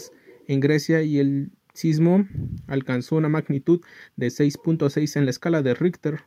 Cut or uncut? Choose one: cut